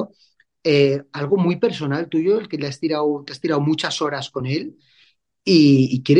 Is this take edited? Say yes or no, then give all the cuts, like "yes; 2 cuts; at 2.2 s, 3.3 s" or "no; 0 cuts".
no; 0 cuts